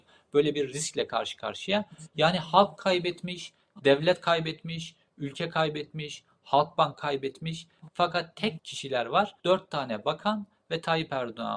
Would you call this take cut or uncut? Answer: cut